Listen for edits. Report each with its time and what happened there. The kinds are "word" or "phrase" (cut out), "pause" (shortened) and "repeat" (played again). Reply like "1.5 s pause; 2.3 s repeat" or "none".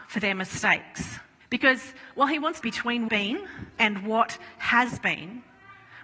1.4 s pause; 2.6 s phrase; 3.1 s phrase